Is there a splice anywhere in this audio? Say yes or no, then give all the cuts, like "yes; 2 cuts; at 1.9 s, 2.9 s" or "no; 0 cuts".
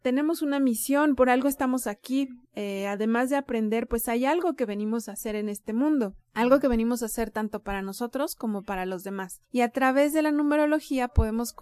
yes; 1 cut; at 2.4 s